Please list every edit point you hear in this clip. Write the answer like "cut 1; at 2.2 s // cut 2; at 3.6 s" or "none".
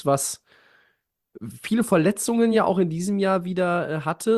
none